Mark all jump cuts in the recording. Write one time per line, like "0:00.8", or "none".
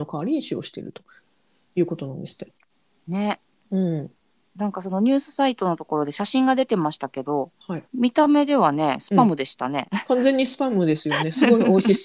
0:07.9